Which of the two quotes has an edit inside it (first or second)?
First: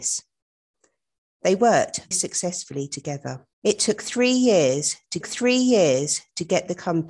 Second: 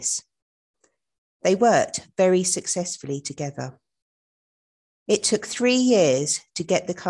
first